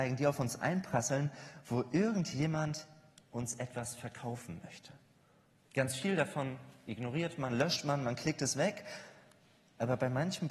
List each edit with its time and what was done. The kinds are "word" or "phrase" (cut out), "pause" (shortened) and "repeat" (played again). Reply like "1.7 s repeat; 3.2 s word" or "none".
none